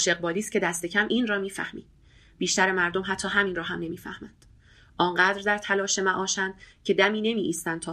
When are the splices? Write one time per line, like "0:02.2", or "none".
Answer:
none